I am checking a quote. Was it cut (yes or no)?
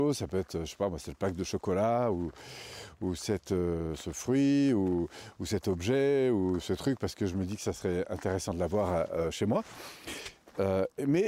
no